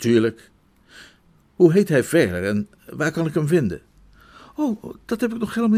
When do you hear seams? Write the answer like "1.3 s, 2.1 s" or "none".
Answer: none

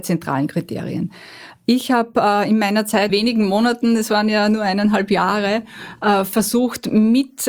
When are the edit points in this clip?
3.1 s

